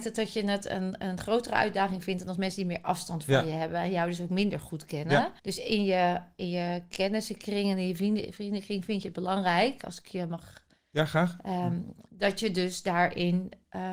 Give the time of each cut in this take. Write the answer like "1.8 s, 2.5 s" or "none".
5.4 s